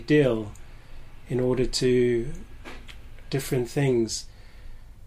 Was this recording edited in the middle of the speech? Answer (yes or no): yes